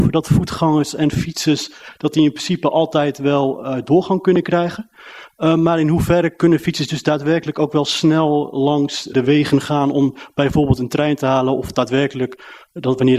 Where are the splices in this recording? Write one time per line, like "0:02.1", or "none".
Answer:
0:09.1